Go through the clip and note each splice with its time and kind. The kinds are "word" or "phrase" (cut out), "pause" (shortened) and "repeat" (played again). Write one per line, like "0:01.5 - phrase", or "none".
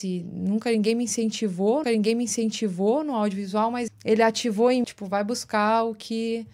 0:01.8 - repeat
0:03.9 - word
0:04.8 - phrase